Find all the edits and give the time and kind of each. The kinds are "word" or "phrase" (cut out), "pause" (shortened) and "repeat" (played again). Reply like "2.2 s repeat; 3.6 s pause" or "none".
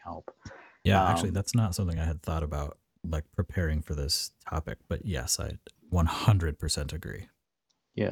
none